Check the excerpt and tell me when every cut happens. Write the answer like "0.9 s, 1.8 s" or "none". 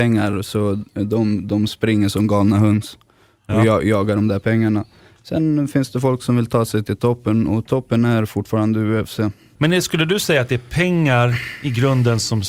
none